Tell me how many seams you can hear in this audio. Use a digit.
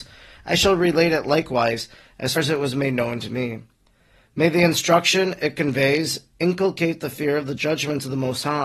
2